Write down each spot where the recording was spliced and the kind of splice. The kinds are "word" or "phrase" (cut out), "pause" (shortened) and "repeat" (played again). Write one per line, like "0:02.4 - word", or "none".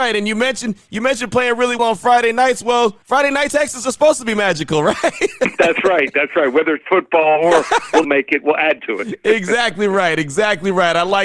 0:01.8 - word
0:03.0 - pause
0:03.5 - word
0:08.0 - word
0:08.8 - word